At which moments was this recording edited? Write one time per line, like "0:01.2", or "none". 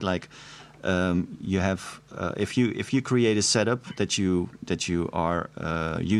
none